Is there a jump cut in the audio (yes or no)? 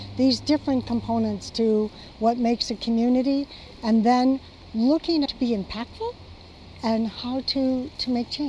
yes